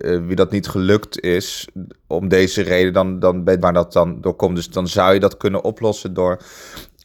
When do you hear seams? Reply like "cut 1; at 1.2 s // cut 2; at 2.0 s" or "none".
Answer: cut 1; at 3.6 s